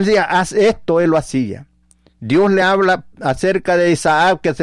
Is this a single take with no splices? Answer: yes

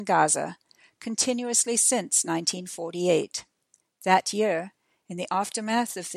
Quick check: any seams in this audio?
no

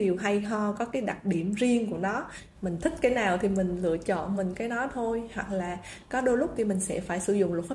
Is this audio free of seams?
yes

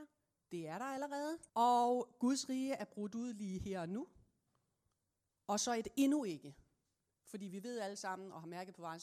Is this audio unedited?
no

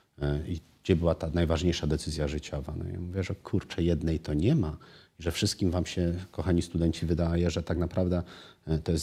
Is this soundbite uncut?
yes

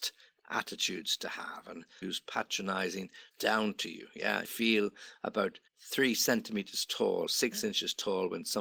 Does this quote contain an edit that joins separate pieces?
yes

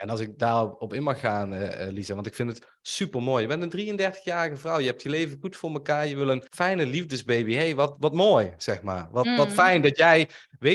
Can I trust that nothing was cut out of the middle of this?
no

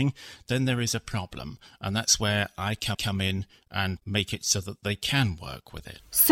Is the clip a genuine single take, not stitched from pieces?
no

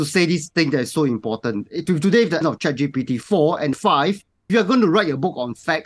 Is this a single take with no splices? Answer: no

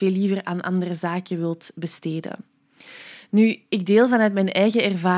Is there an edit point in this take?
no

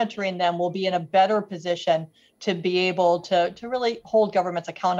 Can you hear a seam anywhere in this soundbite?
no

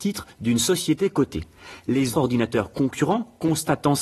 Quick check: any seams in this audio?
yes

